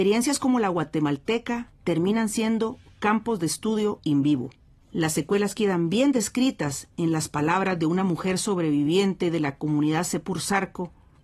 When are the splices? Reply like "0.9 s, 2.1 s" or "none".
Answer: none